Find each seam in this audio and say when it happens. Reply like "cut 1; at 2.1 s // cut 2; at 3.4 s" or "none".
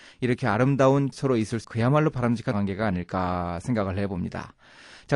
cut 1; at 1.1 s // cut 2; at 1.6 s // cut 3; at 2.5 s